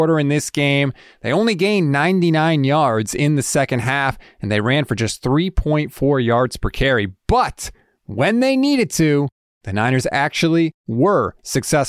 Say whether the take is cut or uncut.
uncut